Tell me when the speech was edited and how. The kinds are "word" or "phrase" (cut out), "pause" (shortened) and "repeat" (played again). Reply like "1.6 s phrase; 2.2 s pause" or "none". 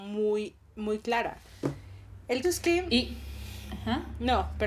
2.4 s word